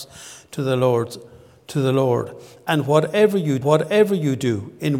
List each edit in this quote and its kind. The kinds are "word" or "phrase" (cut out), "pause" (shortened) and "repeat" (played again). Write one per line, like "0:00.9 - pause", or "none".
0:03.6 - repeat